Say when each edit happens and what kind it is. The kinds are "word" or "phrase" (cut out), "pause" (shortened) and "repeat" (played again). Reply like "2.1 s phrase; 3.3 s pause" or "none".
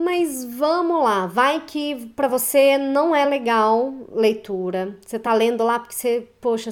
none

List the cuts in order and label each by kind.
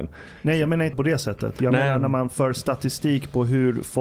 0.9 s word

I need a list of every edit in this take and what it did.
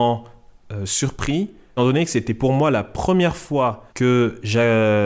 1.8 s word; 3.9 s pause

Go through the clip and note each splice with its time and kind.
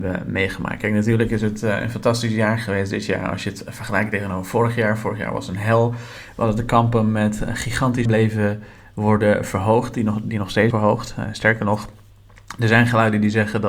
8.1 s phrase; 10.7 s word

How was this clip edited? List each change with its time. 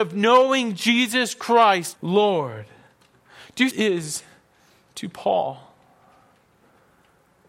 2.0 s word; 3.7 s phrase

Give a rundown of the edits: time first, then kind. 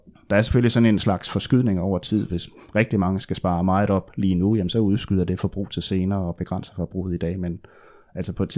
none

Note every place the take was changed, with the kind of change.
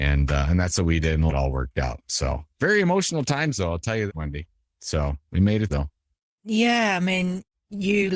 1.3 s word; 2.5 s pause; 4.1 s word; 5.2 s pause; 5.7 s word

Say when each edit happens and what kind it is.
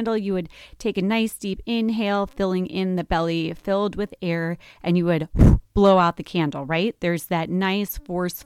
5.6 s pause

